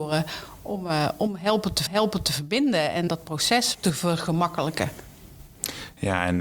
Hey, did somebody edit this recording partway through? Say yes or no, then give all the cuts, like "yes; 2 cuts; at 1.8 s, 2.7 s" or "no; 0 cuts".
yes; 3 cuts; at 1.9 s, 3.1 s, 3.7 s